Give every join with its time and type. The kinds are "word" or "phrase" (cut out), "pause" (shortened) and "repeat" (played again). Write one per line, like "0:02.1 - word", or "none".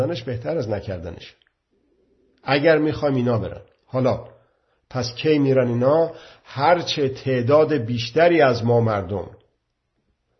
none